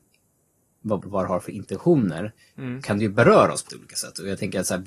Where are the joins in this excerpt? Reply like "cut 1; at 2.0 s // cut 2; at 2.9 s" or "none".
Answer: cut 1; at 1.0 s // cut 2; at 2.8 s // cut 3; at 3.7 s